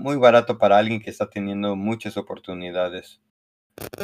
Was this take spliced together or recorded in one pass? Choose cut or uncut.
uncut